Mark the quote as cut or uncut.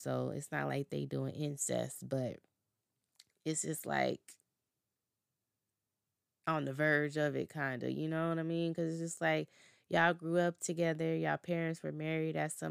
uncut